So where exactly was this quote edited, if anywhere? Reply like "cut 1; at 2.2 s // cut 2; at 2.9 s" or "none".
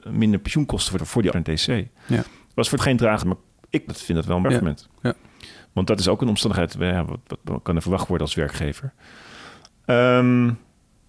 cut 1; at 1.0 s // cut 2; at 1.3 s // cut 3; at 2.8 s // cut 4; at 3.2 s // cut 5; at 3.9 s // cut 6; at 4.4 s // cut 7; at 7.4 s // cut 8; at 7.8 s